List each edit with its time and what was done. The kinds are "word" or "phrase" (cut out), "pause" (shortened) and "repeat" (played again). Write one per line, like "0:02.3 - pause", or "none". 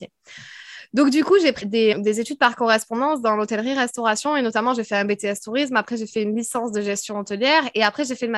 0:01.6 - word
0:01.9 - word